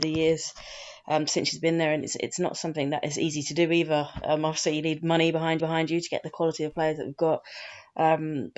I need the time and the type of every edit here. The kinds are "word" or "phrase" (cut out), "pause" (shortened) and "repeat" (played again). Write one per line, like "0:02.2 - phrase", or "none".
0:05.6 - repeat